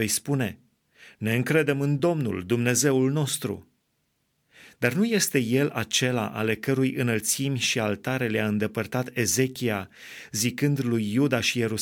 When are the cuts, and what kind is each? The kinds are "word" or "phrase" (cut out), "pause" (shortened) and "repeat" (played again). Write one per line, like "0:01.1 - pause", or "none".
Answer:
none

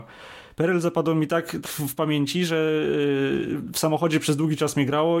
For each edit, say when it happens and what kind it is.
0:01.6 - word

